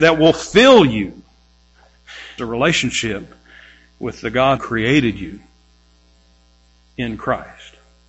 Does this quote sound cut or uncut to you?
cut